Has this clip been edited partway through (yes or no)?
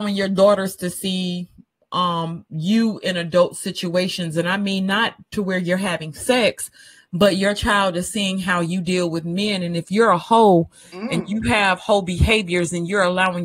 no